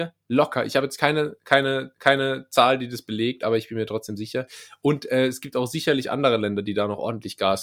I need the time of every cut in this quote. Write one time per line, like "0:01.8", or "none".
0:01.9